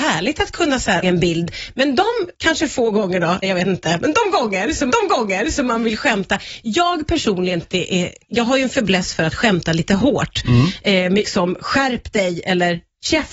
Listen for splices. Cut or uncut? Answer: cut